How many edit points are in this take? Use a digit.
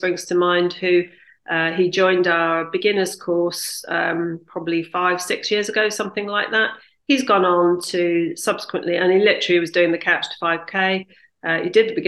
0